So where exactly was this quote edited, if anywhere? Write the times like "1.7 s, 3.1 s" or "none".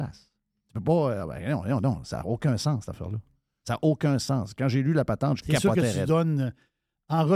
none

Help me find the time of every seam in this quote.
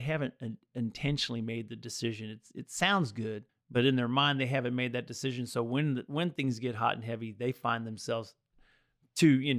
3.5 s

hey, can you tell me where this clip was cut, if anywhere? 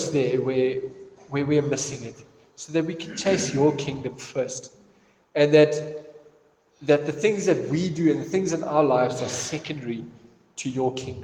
none

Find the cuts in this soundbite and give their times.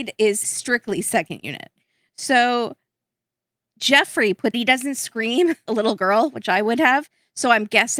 4.5 s, 5.7 s

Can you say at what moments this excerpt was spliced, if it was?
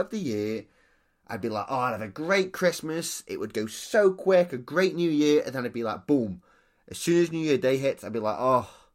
none

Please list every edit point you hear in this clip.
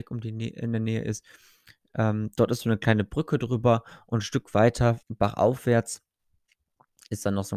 5.0 s

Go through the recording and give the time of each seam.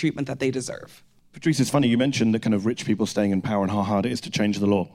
1.2 s

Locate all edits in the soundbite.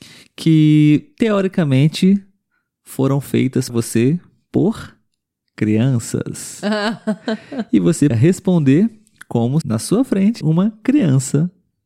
3.7 s, 8.1 s, 9.6 s, 10.4 s

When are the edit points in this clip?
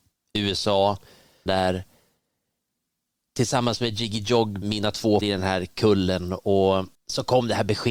1.5 s, 4.6 s, 5.2 s, 6.9 s

